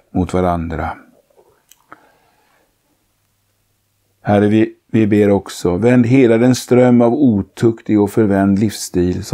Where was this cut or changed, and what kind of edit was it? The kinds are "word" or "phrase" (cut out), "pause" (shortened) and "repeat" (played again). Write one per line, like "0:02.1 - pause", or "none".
none